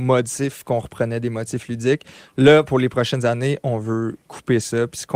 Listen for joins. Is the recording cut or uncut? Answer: uncut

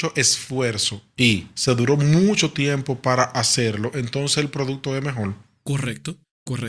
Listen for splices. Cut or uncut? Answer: uncut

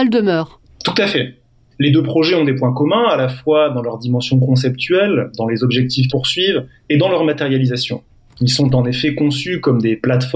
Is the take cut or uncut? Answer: cut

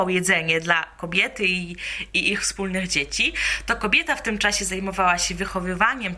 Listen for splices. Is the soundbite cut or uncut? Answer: uncut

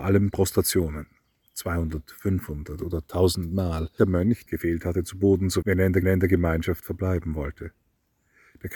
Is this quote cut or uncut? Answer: cut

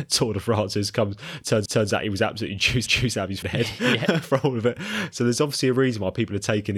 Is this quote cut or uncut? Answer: cut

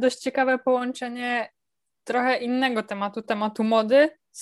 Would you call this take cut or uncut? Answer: uncut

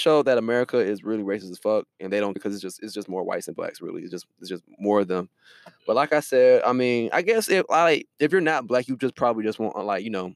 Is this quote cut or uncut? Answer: cut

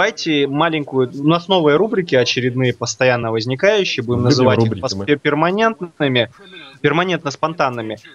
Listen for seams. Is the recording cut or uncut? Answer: uncut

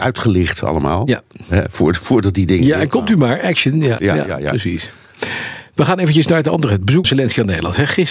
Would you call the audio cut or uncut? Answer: cut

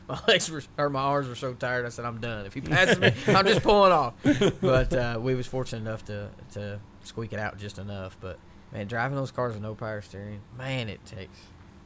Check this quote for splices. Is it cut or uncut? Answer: cut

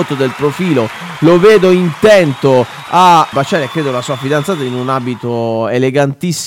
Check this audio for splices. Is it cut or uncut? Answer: cut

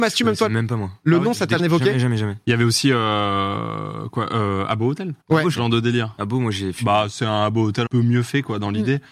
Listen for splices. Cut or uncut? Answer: cut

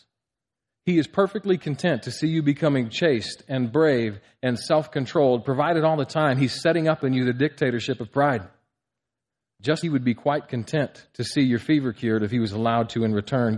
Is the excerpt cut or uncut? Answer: cut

